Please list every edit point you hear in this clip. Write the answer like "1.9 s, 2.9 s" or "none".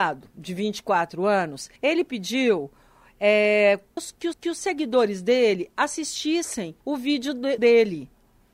1.8 s, 4.0 s, 4.3 s, 6.8 s, 7.6 s